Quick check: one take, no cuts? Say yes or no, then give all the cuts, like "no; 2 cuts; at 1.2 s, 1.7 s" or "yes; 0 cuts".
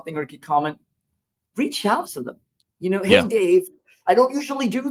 yes; 0 cuts